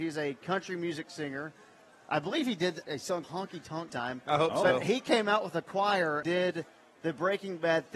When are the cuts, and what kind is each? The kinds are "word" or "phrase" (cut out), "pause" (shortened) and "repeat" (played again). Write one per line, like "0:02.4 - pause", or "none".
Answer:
0:02.8 - word
0:03.2 - word
0:03.9 - phrase
0:06.2 - word